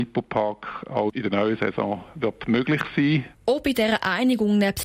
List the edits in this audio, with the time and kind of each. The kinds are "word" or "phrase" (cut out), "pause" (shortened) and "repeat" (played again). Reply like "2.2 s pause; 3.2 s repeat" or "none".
3.4 s pause